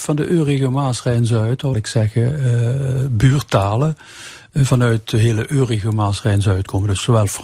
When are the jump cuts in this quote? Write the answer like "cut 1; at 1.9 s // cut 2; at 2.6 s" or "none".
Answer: cut 1; at 1.7 s